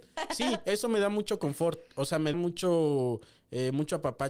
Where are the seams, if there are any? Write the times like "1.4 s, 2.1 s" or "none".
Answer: 2.3 s